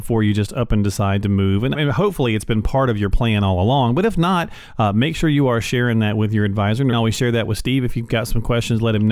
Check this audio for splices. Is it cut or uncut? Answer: cut